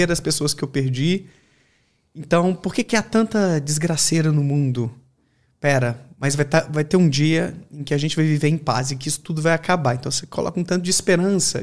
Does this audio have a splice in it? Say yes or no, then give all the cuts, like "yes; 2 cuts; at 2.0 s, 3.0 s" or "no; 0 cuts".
no; 0 cuts